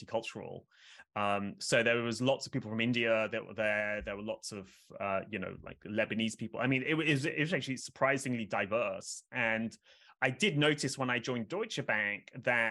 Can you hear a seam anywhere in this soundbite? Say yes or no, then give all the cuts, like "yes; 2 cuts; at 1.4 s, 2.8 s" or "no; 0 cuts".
no; 0 cuts